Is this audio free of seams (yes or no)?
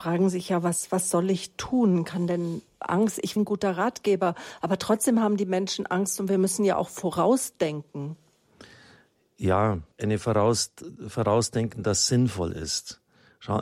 no